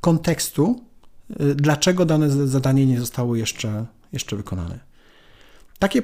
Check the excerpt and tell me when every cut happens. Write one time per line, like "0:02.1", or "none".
none